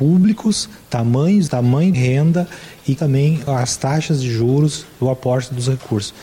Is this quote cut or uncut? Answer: cut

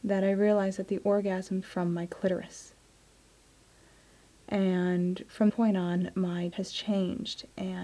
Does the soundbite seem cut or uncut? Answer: cut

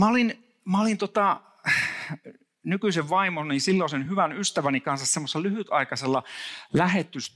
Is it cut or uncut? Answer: uncut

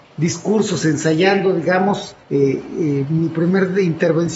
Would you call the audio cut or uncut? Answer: cut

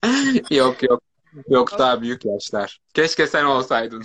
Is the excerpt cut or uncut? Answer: cut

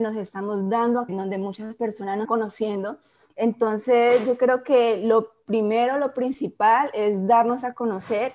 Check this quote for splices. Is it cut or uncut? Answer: cut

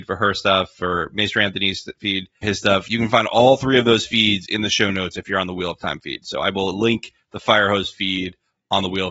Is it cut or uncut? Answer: cut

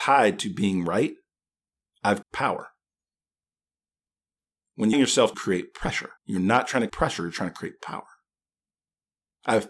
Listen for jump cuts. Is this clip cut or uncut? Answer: cut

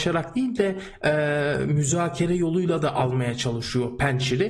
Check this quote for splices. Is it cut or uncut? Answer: uncut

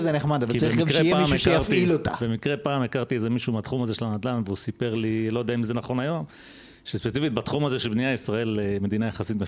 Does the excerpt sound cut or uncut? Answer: uncut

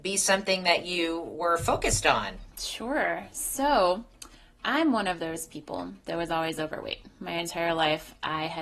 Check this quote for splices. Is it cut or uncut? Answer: uncut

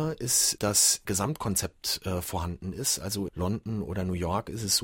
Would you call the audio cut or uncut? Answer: cut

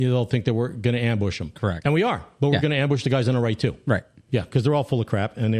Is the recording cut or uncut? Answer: uncut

